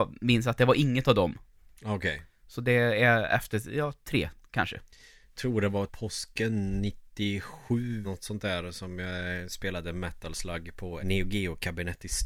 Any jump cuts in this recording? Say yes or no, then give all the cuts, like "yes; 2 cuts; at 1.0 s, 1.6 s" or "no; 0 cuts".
yes; 4 cuts; at 5.4 s, 5.9 s, 8.0 s, 11.0 s